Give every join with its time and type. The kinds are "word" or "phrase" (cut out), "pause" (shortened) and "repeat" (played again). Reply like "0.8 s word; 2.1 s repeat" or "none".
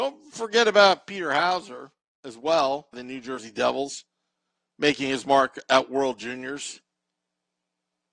2.9 s phrase